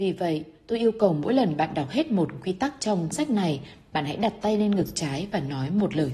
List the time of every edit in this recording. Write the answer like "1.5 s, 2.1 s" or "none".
3.1 s